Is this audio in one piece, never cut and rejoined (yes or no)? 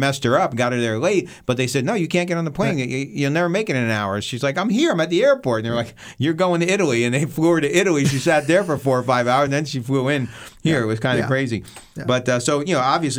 yes